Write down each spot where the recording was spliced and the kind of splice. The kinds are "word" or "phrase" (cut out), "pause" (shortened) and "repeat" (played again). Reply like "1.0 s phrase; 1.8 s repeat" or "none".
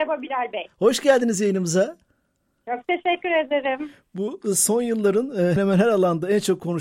5.6 s word